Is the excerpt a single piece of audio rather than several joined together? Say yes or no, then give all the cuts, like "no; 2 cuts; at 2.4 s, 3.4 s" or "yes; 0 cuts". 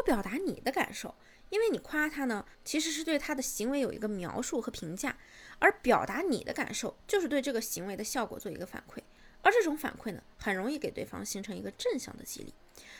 no; 1 cut; at 2.5 s